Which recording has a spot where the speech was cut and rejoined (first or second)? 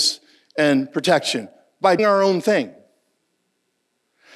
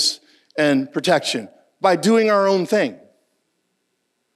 first